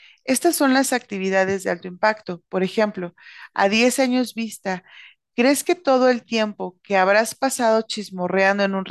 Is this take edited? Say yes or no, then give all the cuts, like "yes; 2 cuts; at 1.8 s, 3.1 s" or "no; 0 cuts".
no; 0 cuts